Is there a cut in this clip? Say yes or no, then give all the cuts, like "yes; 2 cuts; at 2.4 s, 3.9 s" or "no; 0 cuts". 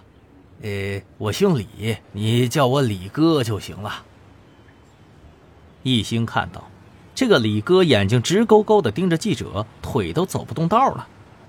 yes; 1 cut; at 2.0 s